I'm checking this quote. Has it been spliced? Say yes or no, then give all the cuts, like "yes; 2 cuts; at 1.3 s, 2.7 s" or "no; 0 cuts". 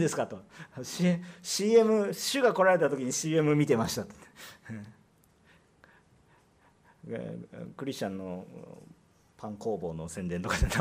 no; 0 cuts